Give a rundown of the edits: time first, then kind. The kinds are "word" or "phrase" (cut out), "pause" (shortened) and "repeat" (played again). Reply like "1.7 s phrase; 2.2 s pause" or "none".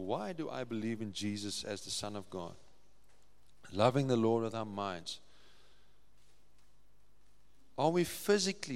none